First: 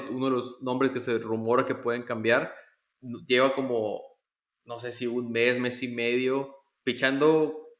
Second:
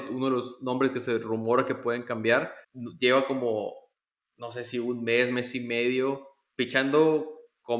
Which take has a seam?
second; 1 cut; at 2.6 s

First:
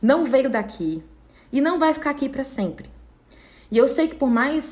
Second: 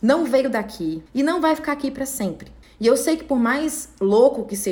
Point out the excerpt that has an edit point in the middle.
second; 2 cuts; at 1.1 s, 2.6 s

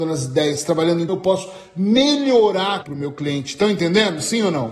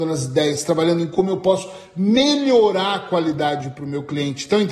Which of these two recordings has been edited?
first; 2 cuts; at 1.1 s, 2.8 s

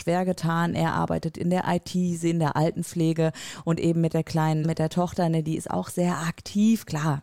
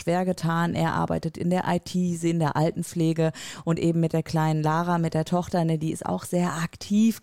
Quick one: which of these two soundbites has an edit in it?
first; 1 cut; at 4.6 s

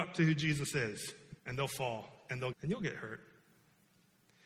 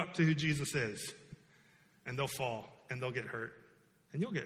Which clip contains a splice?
first; 2 cuts; at 1.4 s, 2.5 s

